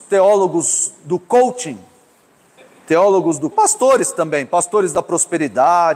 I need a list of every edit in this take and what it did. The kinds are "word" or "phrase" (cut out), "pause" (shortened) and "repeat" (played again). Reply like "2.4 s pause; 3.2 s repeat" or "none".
3.5 s word